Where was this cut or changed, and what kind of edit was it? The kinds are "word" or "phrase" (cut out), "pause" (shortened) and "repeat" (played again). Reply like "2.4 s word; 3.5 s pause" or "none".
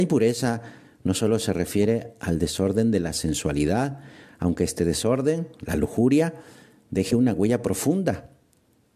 none